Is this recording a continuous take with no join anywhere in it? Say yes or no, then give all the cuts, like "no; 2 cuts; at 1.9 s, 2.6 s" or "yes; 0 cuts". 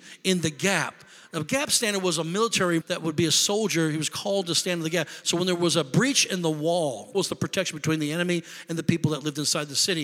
no; 2 cuts; at 2.8 s, 7.1 s